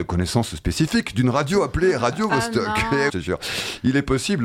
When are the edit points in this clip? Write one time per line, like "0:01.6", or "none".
0:03.1